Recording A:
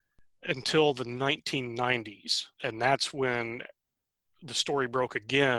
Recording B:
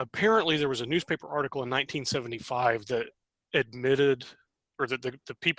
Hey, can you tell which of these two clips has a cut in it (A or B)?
A